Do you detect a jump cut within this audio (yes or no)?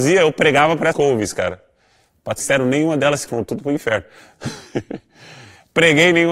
yes